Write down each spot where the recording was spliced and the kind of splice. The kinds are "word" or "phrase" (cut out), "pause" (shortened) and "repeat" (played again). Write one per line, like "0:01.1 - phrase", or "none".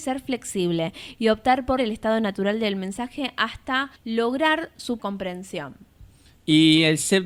0:01.8 - word
0:04.0 - pause
0:05.0 - word
0:06.3 - pause